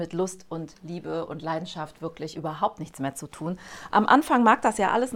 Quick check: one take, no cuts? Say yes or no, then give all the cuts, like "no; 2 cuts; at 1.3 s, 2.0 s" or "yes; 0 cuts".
no; 1 cut; at 2.3 s